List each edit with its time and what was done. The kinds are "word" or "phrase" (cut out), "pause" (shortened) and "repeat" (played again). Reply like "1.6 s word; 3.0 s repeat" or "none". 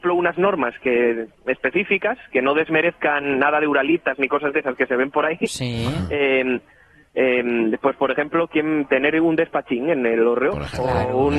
none